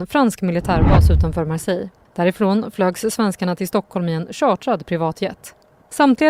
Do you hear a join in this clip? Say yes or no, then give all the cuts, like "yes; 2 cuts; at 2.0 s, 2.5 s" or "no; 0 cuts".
no; 0 cuts